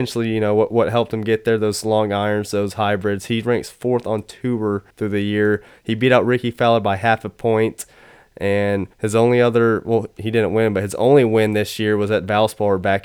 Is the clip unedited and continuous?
no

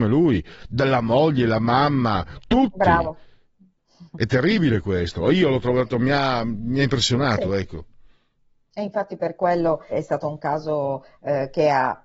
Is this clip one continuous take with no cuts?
no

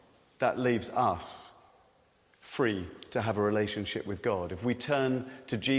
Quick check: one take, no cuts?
yes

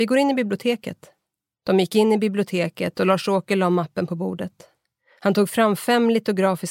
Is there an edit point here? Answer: no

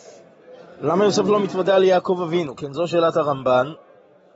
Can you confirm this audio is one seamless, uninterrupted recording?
yes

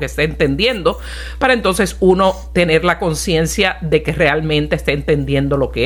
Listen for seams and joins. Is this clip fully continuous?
yes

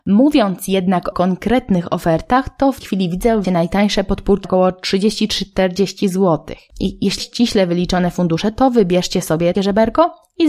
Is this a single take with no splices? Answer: no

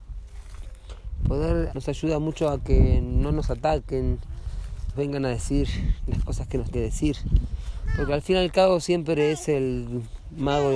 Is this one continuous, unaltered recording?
no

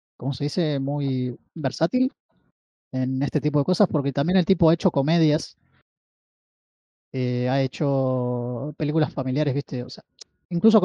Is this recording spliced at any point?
no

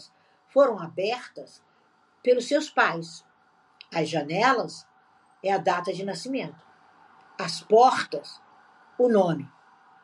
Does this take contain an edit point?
no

